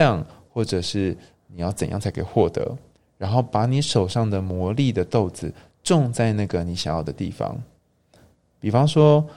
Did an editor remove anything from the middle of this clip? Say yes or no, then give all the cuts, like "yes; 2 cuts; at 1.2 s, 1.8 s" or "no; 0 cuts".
no; 0 cuts